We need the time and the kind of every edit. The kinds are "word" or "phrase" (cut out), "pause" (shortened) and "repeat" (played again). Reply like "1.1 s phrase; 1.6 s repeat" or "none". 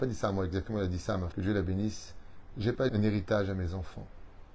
1.3 s word; 2.9 s word